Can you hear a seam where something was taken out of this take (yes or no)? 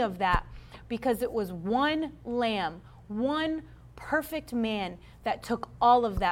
no